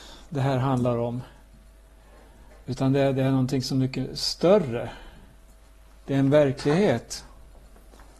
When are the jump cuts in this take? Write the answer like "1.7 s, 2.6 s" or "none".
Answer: none